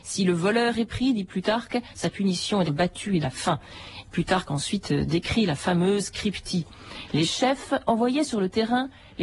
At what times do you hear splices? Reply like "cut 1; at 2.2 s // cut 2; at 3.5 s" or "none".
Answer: cut 1; at 2.7 s // cut 2; at 3.2 s